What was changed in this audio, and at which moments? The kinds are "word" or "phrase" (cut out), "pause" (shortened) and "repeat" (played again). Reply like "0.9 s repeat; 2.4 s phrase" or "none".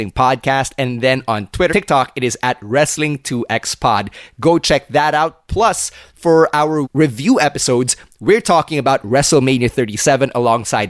1.7 s word; 6.8 s word